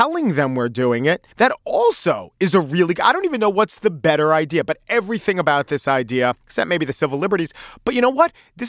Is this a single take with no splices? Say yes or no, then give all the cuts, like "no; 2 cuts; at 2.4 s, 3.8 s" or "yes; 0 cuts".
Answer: no; 2 cuts; at 1.3 s, 6.4 s